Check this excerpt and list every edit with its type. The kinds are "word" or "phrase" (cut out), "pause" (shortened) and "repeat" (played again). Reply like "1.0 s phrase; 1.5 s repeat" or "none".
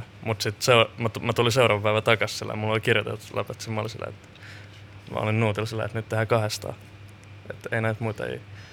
none